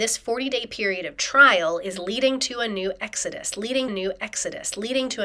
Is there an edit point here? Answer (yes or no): yes